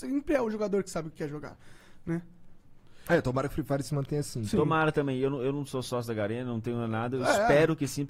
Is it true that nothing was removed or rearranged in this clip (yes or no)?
yes